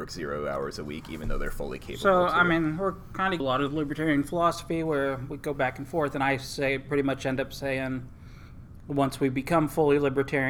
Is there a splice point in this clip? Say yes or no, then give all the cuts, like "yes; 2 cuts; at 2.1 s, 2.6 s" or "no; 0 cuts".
yes; 1 cut; at 3.4 s